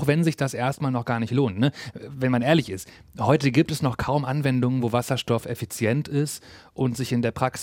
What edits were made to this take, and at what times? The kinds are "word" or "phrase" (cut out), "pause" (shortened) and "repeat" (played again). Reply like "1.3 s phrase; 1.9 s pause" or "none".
none